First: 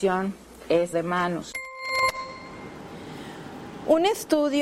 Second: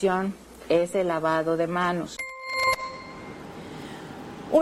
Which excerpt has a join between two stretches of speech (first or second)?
first